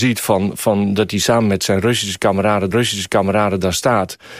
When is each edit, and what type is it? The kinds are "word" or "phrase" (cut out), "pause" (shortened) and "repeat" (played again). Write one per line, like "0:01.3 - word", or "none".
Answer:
0:02.7 - repeat